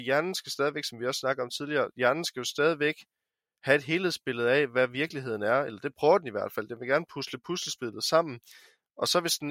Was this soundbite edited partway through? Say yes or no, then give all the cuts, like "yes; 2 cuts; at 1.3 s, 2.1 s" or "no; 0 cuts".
no; 0 cuts